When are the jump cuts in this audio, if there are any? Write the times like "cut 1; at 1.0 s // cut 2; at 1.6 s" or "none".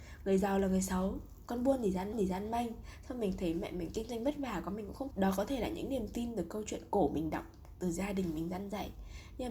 cut 1; at 2.1 s // cut 2; at 5.1 s